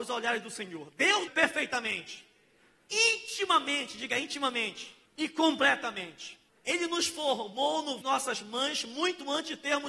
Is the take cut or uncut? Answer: cut